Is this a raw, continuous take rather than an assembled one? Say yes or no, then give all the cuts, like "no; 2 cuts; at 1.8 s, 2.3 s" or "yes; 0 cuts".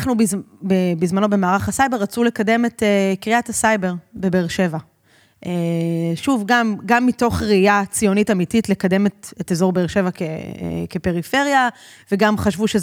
yes; 0 cuts